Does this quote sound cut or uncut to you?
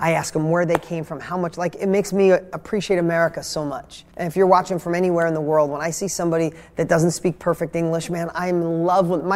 cut